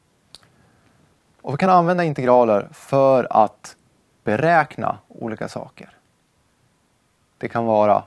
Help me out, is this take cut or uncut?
uncut